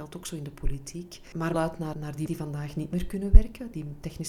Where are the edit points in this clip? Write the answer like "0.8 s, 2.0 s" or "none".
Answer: 1.5 s, 1.9 s, 2.3 s